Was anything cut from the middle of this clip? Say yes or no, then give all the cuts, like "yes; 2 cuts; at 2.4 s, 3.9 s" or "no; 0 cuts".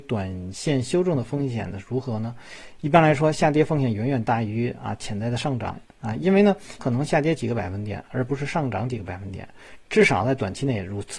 yes; 1 cut; at 6.8 s